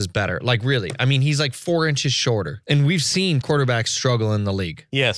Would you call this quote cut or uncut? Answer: cut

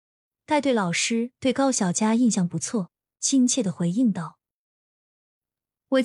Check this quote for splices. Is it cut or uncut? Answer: uncut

